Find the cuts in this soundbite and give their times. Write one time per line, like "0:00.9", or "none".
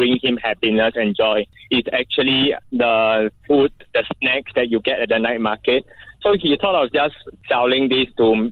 none